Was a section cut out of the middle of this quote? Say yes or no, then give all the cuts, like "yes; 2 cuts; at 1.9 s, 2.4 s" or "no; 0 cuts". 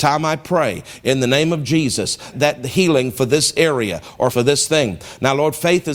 yes; 2 cuts; at 2.3 s, 4.3 s